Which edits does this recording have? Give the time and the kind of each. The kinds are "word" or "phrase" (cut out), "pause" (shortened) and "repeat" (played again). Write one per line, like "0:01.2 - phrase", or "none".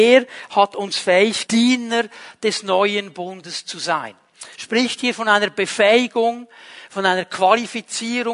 0:01.5 - word